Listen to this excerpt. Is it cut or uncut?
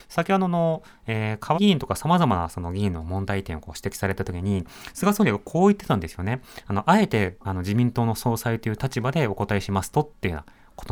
cut